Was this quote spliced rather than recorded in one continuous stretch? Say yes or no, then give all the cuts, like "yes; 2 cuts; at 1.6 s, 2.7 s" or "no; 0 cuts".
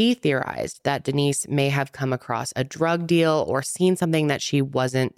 no; 0 cuts